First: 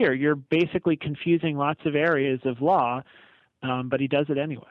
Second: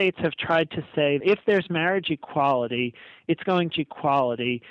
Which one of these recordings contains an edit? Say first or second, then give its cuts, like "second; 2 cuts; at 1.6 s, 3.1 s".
second; 2 cuts; at 1.2 s, 3.7 s